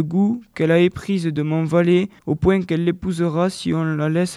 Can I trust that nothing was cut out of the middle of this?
no; 1 cut; at 2.2 s

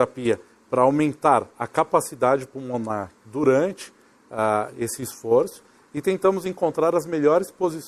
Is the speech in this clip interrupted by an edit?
no; 0 cuts

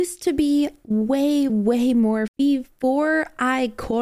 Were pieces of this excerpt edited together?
yes; 2 cuts; at 1.5 s, 2.3 s

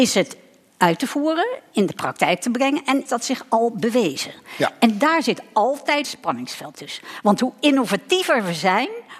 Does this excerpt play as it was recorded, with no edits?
no; 2 cuts; at 3.1 s, 6.0 s

